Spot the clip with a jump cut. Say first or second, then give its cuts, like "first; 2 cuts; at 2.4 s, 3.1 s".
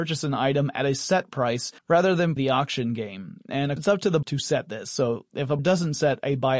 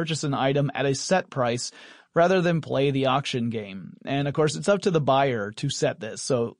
first; 5 cuts; at 1.8 s, 2.4 s, 3.8 s, 4.2 s, 5.6 s